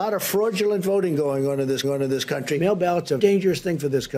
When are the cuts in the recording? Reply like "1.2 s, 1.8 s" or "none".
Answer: 1.8 s, 3.2 s